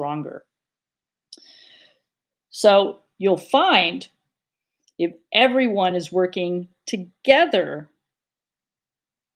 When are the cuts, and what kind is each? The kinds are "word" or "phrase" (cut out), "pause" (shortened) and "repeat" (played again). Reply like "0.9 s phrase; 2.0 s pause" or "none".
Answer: none

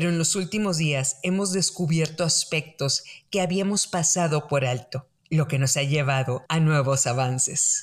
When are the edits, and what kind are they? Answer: 5.2 s pause; 6.5 s pause

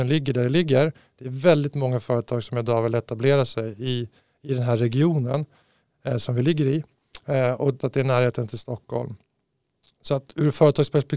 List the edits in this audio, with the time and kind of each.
7.8 s word

